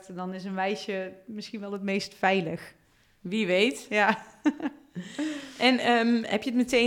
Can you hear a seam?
no; 0 cuts

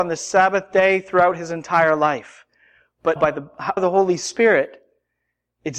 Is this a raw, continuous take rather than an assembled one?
no; 2 cuts; at 3.2 s, 3.8 s

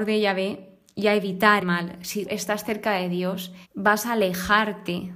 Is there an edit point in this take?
yes; 3 cuts; at 1.6 s, 2.2 s, 3.6 s

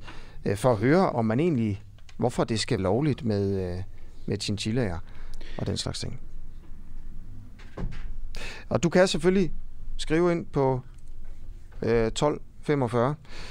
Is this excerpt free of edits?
no; 2 cuts; at 1.1 s, 2.8 s

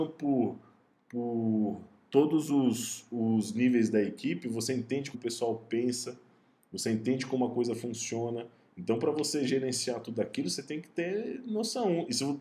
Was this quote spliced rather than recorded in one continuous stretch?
yes; 1 cut; at 5.1 s

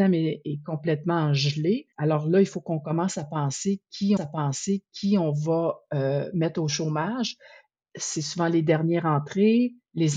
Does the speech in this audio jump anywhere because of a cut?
yes; 2 cuts; at 1.9 s, 4.2 s

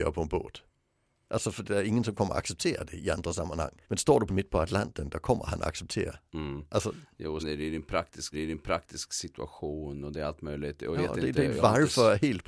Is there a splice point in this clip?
yes; 7 cuts; at 1.6 s, 3.8 s, 4.3 s, 6.3 s, 7.4 s, 8.3 s, 10.9 s

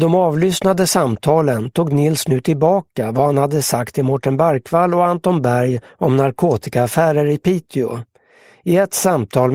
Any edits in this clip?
no; 0 cuts

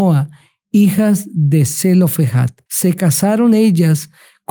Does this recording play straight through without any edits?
no; 1 cut; at 2.7 s

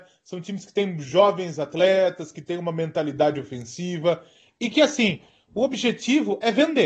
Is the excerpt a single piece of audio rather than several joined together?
yes; 0 cuts

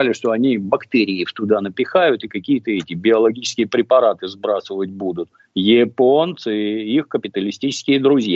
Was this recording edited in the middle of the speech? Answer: no; 0 cuts

